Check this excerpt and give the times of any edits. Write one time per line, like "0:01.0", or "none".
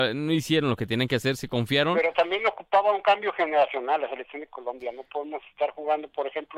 none